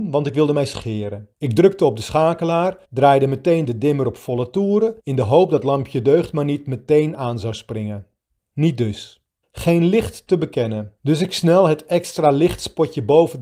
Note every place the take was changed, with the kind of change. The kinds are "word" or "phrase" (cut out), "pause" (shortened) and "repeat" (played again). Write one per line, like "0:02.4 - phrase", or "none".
0:01.3 - pause
0:02.8 - pause
0:05.0 - pause
0:08.4 - pause
0:09.4 - pause
0:11.0 - pause